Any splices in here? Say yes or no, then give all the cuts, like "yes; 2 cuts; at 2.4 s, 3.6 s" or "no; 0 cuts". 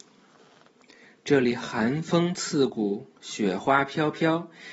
no; 0 cuts